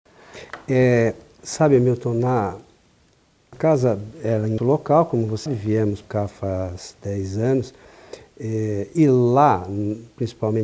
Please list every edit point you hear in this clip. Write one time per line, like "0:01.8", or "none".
0:03.5
0:04.6
0:05.5
0:06.0
0:08.9